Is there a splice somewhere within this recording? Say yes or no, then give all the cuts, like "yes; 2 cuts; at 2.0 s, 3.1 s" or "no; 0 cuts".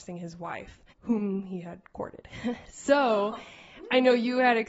yes; 1 cut; at 0.9 s